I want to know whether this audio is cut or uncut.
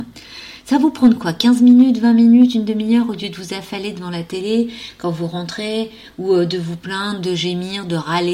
uncut